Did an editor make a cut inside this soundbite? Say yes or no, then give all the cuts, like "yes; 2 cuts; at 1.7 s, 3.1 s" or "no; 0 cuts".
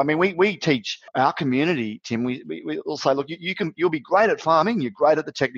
yes; 1 cut; at 1.1 s